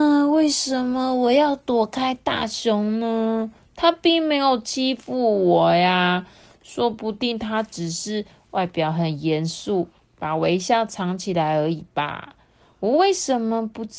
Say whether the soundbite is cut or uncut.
uncut